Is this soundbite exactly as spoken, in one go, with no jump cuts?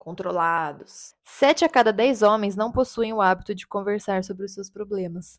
yes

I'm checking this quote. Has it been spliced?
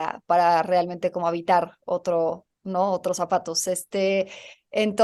no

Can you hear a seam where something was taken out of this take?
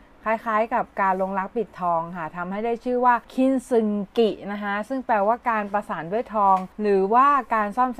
yes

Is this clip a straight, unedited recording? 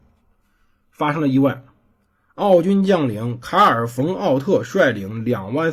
yes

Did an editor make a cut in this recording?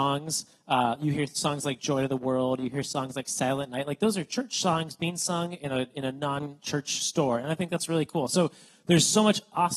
no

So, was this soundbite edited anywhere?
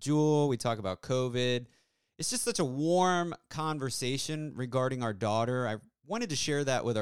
no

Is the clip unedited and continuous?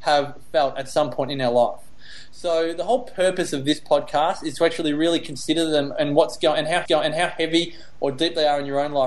no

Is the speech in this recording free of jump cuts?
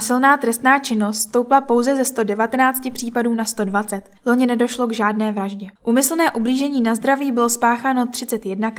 no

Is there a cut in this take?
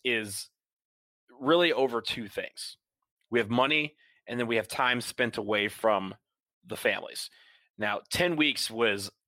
no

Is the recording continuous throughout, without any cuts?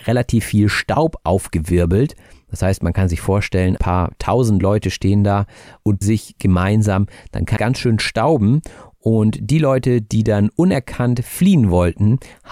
no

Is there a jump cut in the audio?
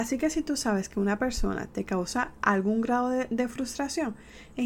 no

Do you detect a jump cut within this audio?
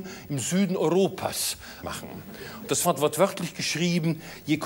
yes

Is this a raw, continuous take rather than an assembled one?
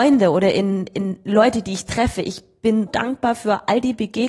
no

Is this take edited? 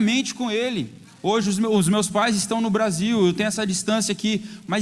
no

